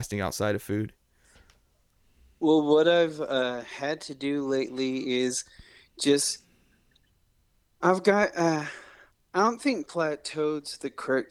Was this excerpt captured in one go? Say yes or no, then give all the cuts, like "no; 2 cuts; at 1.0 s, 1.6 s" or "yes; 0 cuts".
yes; 0 cuts